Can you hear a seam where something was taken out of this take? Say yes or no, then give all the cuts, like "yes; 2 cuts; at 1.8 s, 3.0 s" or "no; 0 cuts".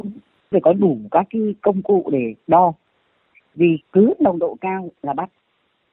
yes; 1 cut; at 3.8 s